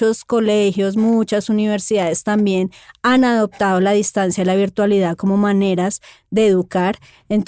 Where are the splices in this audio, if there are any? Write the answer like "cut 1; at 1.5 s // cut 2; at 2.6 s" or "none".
none